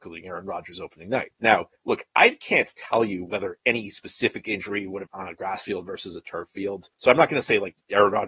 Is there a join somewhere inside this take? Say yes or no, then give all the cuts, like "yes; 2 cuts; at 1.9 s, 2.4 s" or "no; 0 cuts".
yes; 3 cuts; at 1.8 s, 5.1 s, 6.9 s